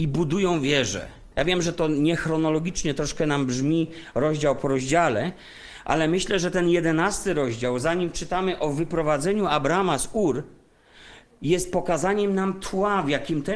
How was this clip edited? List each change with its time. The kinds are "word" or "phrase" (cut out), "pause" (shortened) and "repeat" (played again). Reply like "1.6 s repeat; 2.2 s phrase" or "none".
1.3 s pause